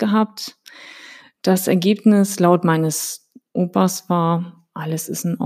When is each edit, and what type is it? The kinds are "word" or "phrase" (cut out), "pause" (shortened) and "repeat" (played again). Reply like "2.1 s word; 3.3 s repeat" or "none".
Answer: none